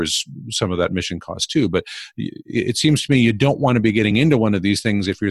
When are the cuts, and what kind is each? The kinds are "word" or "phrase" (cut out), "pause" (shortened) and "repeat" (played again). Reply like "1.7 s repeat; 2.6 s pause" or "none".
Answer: none